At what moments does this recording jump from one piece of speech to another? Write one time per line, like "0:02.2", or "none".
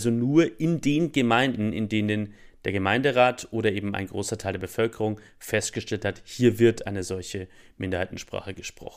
none